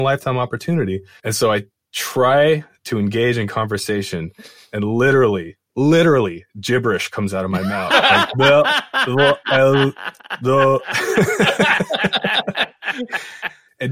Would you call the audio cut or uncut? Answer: uncut